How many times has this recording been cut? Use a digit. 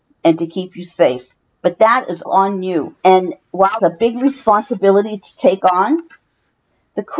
4